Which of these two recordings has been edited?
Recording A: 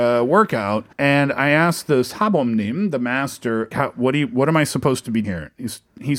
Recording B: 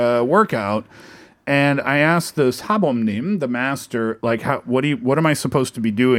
A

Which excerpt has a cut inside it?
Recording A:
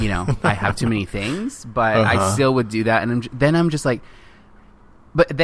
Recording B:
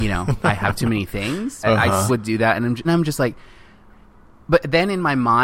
B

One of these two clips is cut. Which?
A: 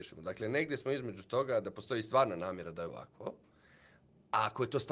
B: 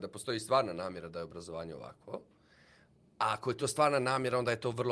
A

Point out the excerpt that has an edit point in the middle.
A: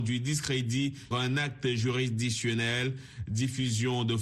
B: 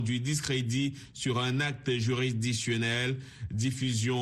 A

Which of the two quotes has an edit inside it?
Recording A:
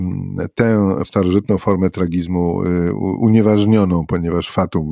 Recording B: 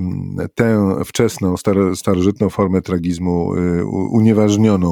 A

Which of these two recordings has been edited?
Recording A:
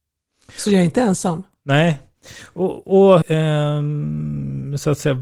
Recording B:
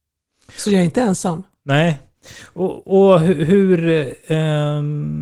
A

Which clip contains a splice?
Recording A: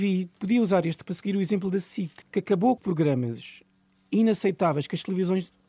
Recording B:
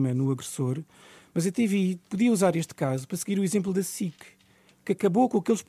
A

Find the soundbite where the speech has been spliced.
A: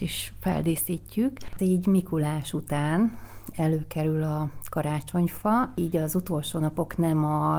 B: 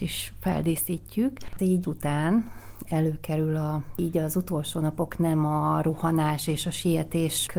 B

